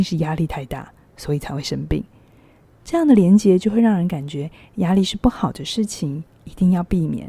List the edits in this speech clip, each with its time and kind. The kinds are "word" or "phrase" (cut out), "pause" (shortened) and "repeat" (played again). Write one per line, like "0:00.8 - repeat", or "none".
none